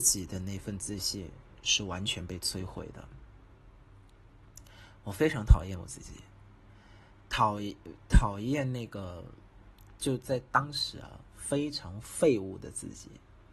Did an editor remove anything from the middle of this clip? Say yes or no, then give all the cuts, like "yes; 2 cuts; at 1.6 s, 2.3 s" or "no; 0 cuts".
no; 0 cuts